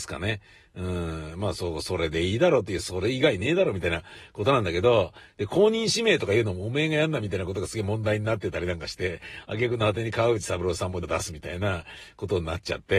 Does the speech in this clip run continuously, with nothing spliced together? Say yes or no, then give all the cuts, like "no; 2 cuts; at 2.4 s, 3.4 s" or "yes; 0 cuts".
no; 1 cut; at 11.0 s